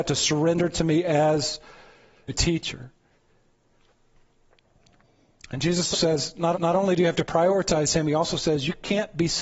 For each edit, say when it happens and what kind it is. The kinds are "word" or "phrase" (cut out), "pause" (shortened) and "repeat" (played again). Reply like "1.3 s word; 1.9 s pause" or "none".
2.3 s phrase; 5.9 s word; 6.5 s repeat

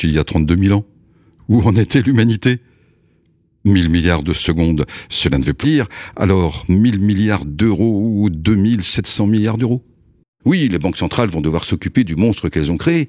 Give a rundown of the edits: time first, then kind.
5.6 s word

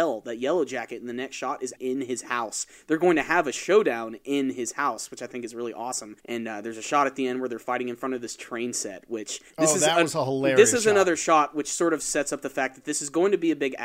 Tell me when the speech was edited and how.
1.8 s word; 6.2 s pause; 9.5 s pause

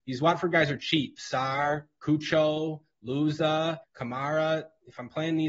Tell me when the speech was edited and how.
3.8 s pause

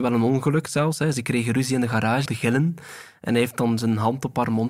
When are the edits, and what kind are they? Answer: 2.3 s phrase

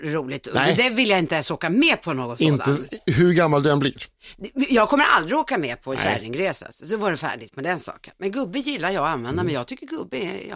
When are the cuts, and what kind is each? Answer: none

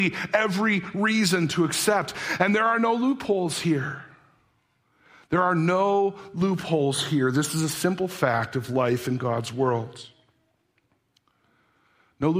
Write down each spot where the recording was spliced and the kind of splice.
none

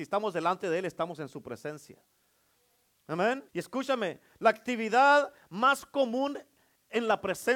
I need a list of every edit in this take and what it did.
3.5 s pause

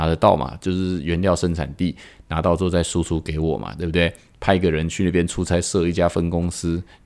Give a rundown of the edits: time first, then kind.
none

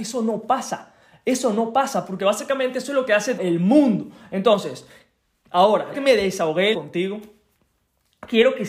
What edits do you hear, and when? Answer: 3.4 s word; 5.9 s word; 6.7 s word

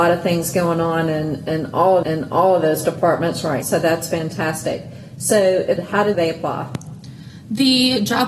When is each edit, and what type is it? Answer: 2.0 s repeat; 3.6 s word; 5.8 s phrase; 6.1 s phrase

